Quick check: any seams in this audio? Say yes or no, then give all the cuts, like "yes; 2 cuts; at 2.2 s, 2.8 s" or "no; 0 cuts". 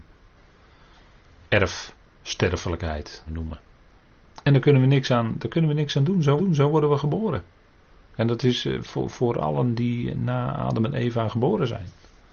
yes; 2 cuts; at 3.3 s, 6.4 s